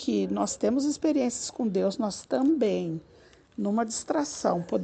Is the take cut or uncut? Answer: uncut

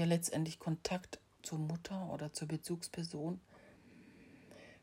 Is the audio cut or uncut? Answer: cut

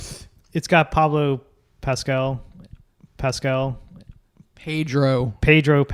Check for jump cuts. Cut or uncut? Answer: cut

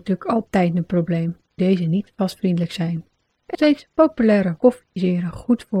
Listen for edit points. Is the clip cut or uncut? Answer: cut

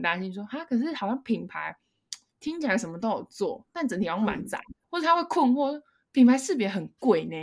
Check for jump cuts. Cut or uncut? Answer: cut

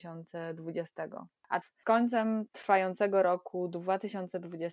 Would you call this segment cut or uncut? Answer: cut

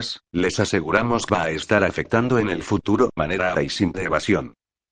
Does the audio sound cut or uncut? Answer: cut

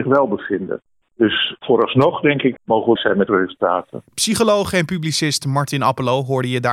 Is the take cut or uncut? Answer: cut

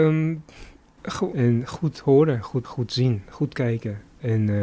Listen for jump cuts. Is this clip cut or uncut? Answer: cut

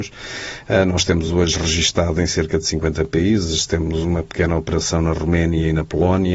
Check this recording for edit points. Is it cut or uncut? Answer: uncut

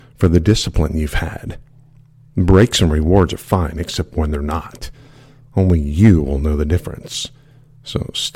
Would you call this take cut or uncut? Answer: uncut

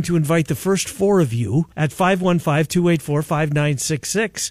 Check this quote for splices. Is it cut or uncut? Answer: cut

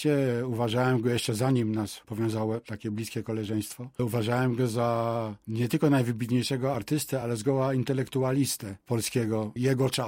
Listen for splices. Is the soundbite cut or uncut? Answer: uncut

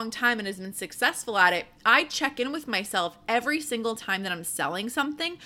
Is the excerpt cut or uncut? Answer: uncut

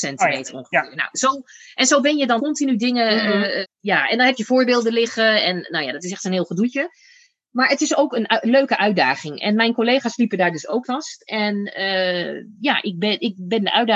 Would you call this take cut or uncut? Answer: cut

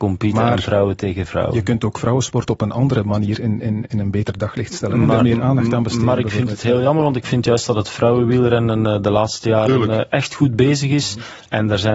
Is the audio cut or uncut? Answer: uncut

